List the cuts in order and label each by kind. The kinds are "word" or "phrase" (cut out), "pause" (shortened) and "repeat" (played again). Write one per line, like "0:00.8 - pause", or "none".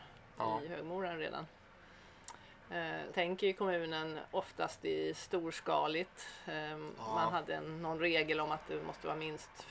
0:03.1 - word